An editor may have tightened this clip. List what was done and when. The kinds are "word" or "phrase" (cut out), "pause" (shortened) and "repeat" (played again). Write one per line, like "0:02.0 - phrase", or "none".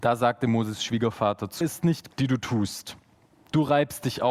0:01.6 - phrase
0:02.1 - word